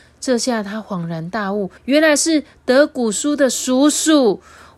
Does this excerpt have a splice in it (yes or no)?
yes